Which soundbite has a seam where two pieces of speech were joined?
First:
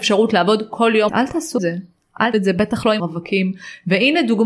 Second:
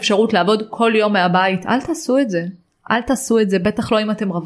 first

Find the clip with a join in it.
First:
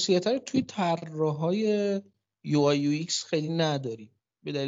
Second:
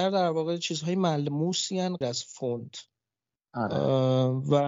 second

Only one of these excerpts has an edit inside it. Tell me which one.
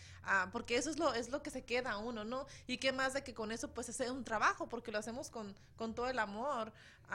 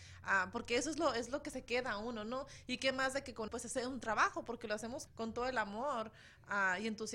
second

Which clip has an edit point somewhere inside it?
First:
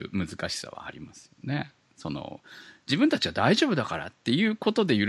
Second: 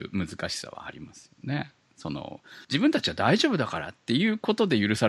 second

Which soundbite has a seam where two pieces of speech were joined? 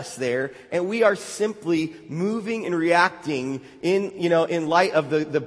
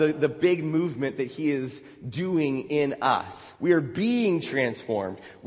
second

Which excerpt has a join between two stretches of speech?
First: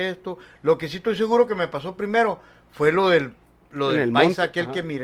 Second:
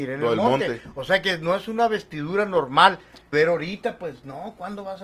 second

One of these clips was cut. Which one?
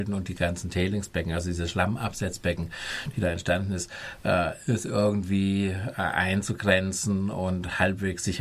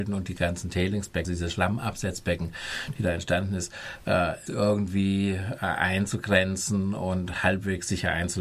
second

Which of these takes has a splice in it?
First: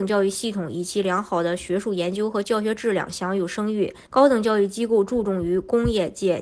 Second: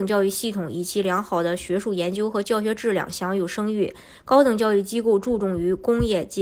first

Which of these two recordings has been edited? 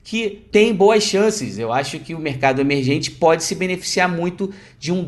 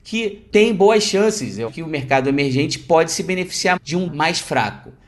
second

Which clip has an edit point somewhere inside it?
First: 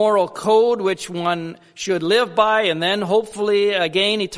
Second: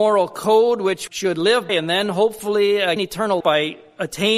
second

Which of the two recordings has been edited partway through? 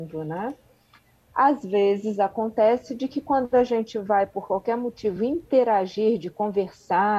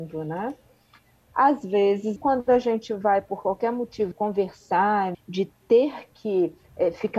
second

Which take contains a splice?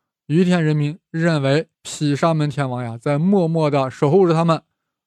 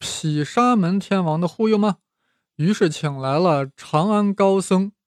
first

